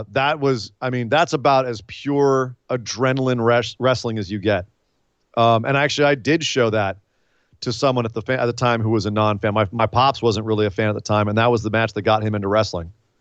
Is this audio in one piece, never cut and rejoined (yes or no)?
yes